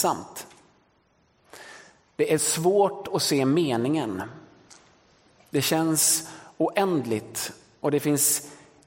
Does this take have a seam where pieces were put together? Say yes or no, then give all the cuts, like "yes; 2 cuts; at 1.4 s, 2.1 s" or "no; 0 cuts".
no; 0 cuts